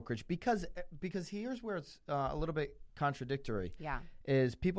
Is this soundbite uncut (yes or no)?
no